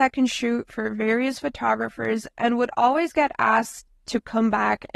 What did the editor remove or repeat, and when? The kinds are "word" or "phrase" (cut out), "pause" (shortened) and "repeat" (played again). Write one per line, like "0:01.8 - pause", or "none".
none